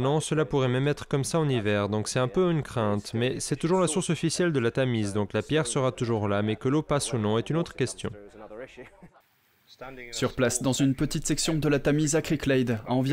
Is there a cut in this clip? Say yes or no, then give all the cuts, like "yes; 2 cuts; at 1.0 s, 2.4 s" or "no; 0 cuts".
no; 0 cuts